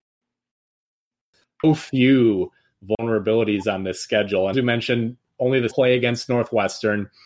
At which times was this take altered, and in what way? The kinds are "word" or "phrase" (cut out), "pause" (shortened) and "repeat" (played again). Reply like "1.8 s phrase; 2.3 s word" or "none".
4.5 s word; 5.7 s word

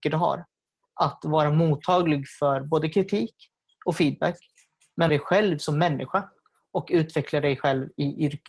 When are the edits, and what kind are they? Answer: 5.1 s phrase

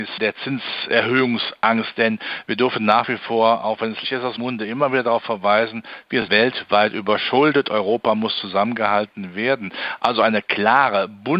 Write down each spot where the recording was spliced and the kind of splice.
4.0 s word; 4.4 s word; 6.3 s word

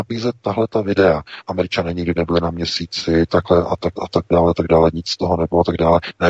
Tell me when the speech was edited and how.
4.0 s word

